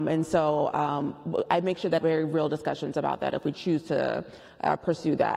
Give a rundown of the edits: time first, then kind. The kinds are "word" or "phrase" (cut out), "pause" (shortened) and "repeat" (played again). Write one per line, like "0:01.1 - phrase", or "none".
0:02.0 - phrase
0:03.5 - word